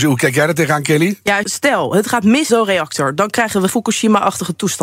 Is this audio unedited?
no; 3 cuts; at 1.4 s, 2.5 s, 3.7 s

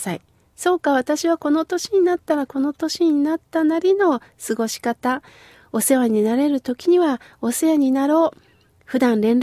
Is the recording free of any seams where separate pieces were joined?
yes; 0 cuts

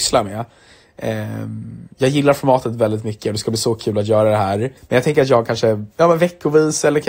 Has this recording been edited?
yes; 2 cuts; at 4.8 s, 5.9 s

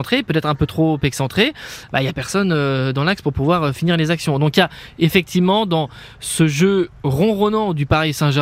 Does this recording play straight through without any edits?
yes; 0 cuts

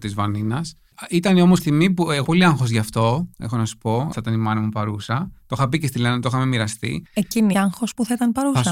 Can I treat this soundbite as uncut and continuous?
no; 4 cuts; at 1.6 s, 2.2 s, 4.1 s, 7.5 s

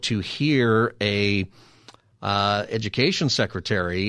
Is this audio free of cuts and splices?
yes; 0 cuts

